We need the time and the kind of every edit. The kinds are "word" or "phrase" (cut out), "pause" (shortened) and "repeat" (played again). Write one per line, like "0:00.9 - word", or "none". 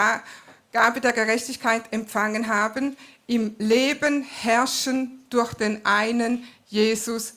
none